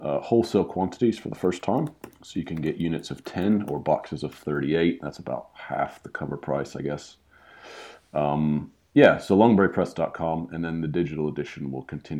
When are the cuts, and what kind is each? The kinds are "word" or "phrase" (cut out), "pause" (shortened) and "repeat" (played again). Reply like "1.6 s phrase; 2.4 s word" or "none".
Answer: 2.2 s pause